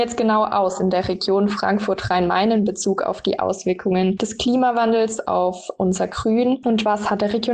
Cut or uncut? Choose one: uncut